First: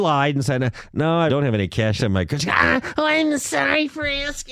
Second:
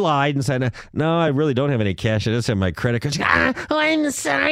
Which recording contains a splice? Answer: first; 3 cuts; at 1.3 s, 2.0 s, 2.3 s

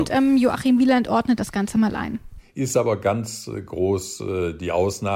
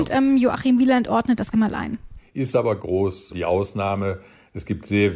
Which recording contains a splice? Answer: second; 3 cuts; at 1.5 s, 2.8 s, 3.3 s

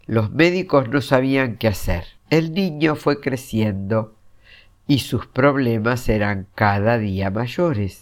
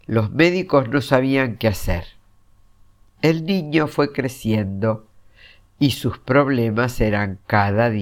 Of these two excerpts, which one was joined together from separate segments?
first; 1 cut; at 2.2 s

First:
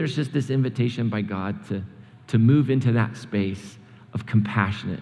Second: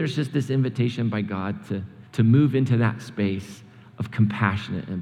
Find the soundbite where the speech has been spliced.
second; 1 cut; at 2.1 s

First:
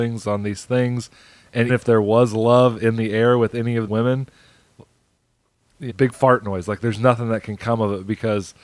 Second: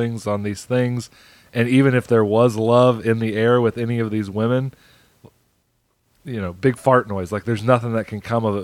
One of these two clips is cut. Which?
first; 3 cuts; at 1.7 s, 3.9 s, 5.9 s

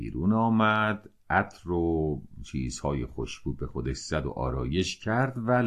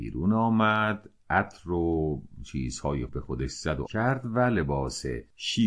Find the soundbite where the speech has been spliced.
second; 2 cuts; at 3.1 s, 3.9 s

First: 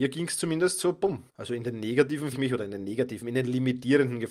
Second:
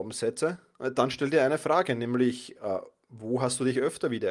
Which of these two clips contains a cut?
first; 2 cuts; at 1.3 s, 2.3 s

